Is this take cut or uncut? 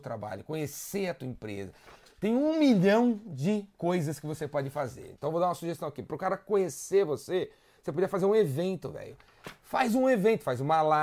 uncut